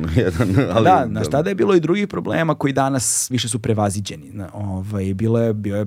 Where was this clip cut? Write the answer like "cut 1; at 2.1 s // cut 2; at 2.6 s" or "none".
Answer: cut 1; at 3.3 s